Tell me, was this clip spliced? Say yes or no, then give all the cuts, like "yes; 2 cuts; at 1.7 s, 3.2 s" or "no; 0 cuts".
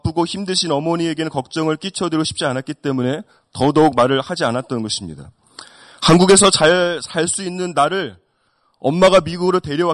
no; 0 cuts